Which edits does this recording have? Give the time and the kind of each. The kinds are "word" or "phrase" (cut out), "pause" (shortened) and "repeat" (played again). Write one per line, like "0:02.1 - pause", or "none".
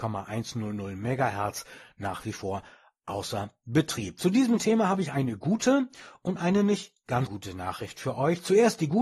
0:07.3 - word